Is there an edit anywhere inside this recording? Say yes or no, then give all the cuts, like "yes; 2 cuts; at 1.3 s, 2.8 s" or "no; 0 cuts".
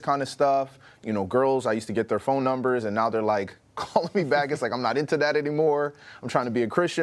no; 0 cuts